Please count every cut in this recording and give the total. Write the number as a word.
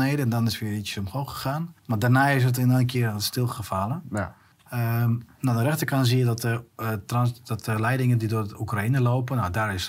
two